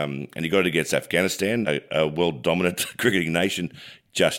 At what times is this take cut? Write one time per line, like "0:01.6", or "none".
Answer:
0:01.6